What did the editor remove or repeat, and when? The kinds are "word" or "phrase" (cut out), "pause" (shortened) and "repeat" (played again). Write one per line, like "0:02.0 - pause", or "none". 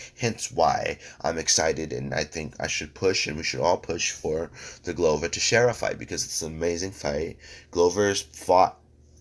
none